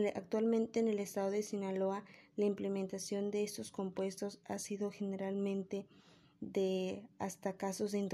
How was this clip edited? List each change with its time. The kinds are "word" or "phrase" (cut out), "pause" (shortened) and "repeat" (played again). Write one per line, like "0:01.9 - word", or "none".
none